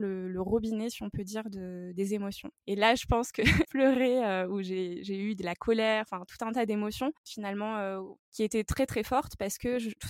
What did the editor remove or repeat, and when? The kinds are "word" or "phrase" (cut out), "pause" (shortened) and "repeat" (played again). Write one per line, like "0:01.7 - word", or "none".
0:02.6 - pause
0:03.6 - word
0:07.2 - pause
0:08.2 - pause